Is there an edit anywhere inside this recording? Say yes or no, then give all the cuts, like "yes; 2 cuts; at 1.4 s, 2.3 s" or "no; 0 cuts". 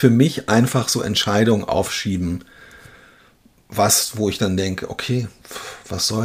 no; 0 cuts